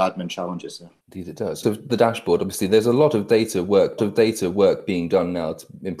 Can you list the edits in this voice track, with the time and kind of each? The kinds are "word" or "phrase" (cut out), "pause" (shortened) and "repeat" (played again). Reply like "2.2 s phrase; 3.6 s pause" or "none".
1.0 s pause; 1.6 s phrase; 4.0 s repeat